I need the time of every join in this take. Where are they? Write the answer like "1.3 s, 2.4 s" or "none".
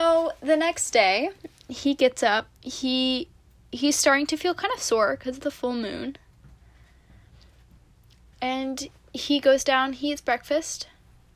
none